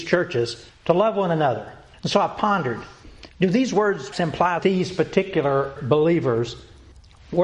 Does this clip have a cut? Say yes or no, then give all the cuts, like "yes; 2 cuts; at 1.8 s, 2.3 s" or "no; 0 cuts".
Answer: yes; 5 cuts; at 1.9 s, 3.3 s, 4.1 s, 4.6 s, 5.8 s